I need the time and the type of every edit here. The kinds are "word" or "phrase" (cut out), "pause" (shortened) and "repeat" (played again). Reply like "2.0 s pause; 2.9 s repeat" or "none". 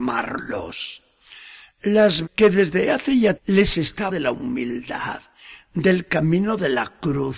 2.2 s word; 3.4 s word; 4.1 s word